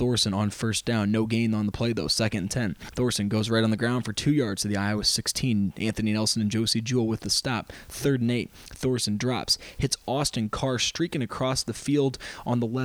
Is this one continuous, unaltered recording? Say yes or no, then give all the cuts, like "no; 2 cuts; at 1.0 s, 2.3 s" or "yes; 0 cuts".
yes; 0 cuts